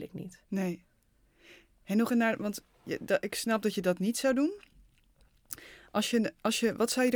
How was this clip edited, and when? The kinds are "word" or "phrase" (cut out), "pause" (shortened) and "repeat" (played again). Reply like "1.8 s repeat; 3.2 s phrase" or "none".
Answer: 2.1 s word